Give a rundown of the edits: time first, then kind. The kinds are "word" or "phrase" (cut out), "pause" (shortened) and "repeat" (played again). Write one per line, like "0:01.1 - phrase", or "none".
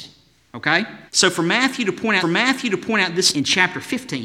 0:01.1 - pause
0:02.2 - repeat
0:03.3 - word